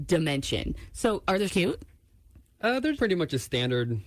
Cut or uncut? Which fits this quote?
cut